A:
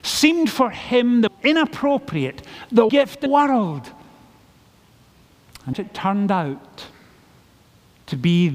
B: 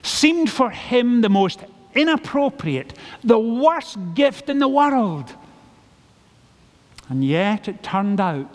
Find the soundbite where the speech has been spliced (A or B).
A